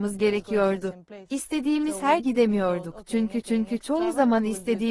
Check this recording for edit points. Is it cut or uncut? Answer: cut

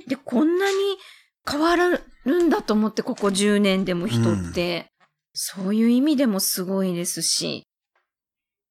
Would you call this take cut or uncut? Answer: cut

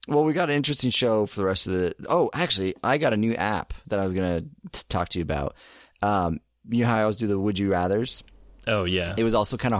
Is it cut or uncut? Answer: uncut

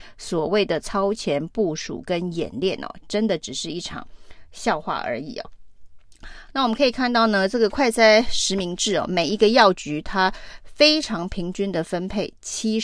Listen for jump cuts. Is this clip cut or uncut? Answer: uncut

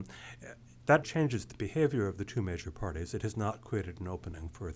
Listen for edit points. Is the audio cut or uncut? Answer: cut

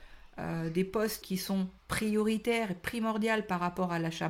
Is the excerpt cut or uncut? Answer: cut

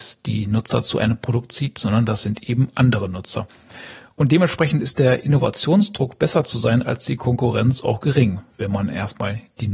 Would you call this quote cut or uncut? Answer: uncut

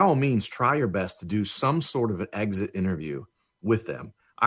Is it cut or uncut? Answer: uncut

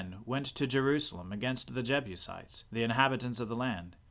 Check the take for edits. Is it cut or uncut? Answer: cut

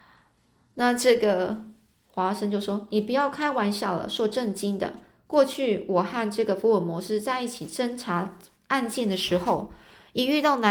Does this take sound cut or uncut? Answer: uncut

